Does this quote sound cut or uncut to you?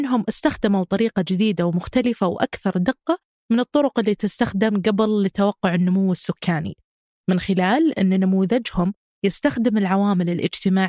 uncut